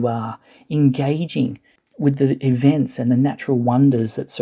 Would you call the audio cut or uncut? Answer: cut